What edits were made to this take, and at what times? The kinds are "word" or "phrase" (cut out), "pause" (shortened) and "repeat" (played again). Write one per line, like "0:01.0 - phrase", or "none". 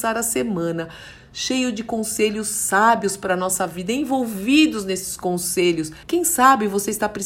0:06.0 - pause